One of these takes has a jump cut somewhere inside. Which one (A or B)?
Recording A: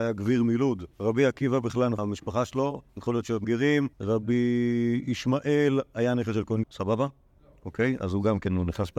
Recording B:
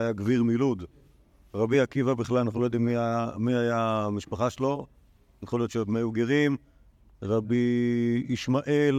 A